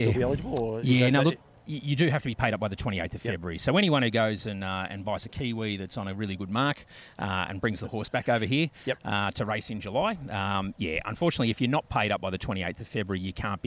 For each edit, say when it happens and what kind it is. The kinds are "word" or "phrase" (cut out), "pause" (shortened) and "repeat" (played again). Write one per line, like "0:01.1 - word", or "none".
none